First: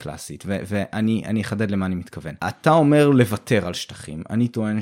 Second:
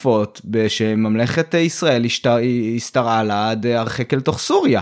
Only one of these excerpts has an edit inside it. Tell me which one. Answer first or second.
first